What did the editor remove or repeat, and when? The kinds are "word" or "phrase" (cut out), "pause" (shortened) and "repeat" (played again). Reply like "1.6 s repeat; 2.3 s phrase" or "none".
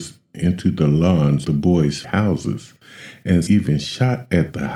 1.4 s word; 2.0 s word; 3.5 s word